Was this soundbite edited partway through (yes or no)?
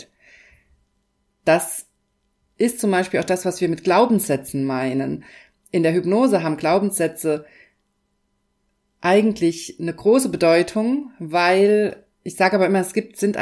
no